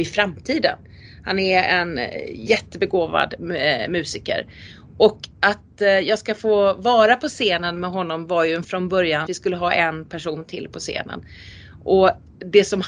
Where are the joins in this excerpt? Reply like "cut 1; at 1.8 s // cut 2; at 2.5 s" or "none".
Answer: cut 1; at 5.3 s // cut 2; at 8.6 s // cut 3; at 9.3 s